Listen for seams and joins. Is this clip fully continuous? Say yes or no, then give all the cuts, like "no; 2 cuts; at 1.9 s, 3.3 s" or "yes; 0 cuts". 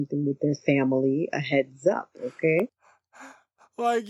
yes; 0 cuts